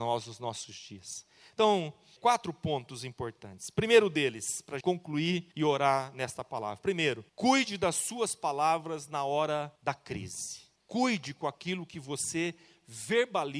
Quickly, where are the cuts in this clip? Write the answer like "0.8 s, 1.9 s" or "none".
2.2 s, 4.8 s, 5.5 s, 7.3 s, 9.8 s, 10.8 s